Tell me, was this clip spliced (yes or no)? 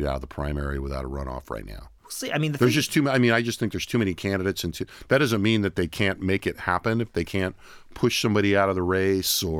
yes